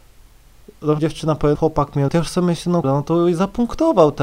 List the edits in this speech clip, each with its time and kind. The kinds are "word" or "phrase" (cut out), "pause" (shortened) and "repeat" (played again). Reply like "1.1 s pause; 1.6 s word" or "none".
1.0 s word; 1.5 s word; 2.1 s word; 2.8 s word